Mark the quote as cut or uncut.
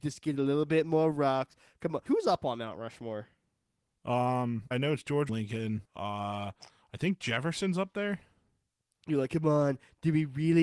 cut